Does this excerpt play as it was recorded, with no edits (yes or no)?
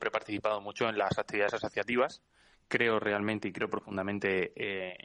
yes